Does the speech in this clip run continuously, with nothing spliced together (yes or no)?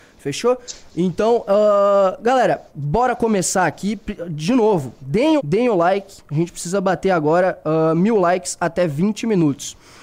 no